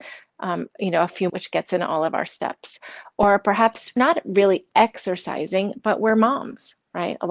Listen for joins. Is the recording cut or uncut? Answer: cut